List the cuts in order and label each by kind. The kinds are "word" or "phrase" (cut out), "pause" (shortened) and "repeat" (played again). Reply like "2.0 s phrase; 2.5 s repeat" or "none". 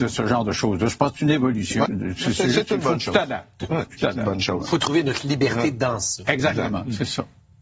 1.9 s word; 3.9 s word